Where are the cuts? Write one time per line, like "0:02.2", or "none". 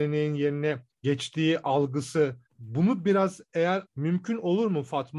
0:00.9
0:02.5
0:03.8